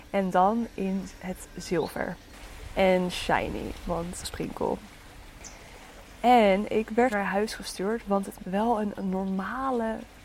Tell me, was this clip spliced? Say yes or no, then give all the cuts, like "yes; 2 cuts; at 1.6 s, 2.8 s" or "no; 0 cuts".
yes; 3 cuts; at 4.2 s, 7.1 s, 8.4 s